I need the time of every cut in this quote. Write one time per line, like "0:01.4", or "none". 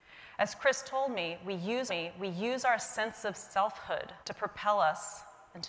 0:01.9
0:04.2

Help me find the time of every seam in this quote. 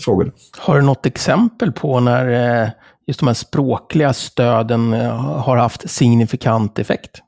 none

